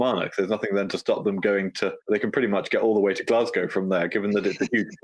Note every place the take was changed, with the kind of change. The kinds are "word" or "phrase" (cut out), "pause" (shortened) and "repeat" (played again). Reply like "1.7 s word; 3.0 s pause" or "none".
2.0 s pause